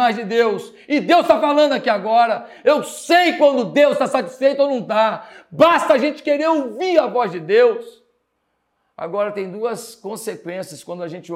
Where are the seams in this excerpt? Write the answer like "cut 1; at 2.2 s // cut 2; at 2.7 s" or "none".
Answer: none